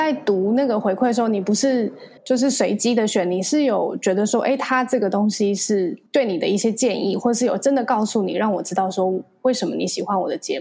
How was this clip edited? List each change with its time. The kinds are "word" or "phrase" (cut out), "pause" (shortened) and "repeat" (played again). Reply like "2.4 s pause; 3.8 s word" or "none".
2.2 s pause; 6.1 s pause